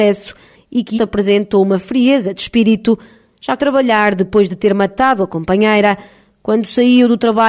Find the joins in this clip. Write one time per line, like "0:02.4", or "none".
0:01.0
0:03.6